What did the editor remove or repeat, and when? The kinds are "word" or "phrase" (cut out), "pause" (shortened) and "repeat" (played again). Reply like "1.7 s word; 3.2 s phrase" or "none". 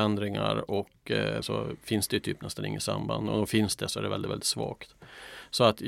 1.4 s word

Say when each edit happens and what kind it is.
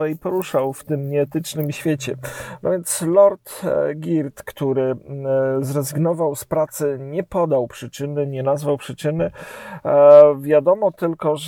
none

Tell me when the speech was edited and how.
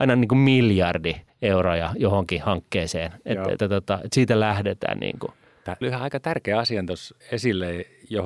1.3 s pause; 3.6 s word; 5.8 s phrase; 7.2 s pause

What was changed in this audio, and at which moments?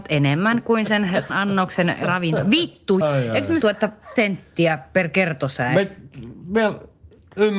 1.3 s word; 2.0 s word; 3.0 s word; 3.6 s word; 4.2 s word

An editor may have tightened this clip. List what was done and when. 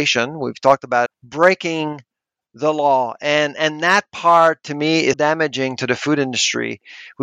1.1 s phrase; 5.1 s word

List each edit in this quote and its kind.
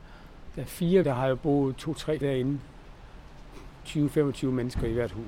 1.0 s word; 2.2 s word

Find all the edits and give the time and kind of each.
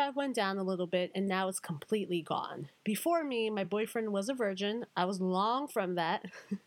none

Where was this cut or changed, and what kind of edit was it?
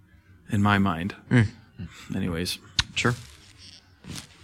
none

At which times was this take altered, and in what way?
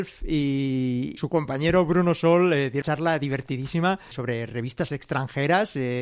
1.2 s word; 2.8 s word; 4.1 s word; 4.9 s word

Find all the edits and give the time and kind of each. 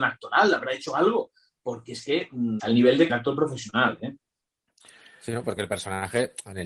2.6 s word; 3.1 s word; 5.6 s word

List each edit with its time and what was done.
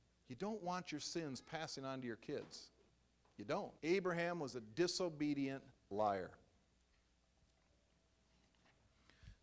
2.9 s pause; 3.8 s pause; 5.7 s pause

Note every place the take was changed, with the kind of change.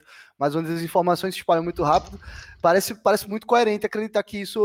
none

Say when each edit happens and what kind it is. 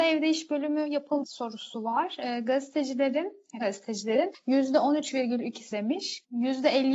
1.2 s word; 3.6 s word; 5.7 s word

